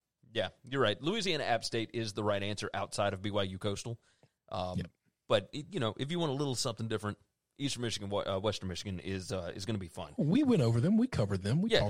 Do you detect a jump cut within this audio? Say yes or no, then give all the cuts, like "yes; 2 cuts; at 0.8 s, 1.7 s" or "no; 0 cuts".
no; 0 cuts